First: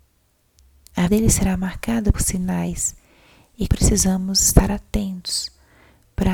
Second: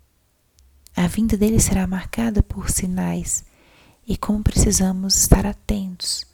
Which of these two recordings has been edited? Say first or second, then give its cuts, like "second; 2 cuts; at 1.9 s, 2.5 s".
first; 3 cuts; at 1.1 s, 2.1 s, 3.7 s